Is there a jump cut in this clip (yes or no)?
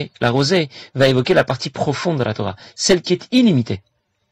no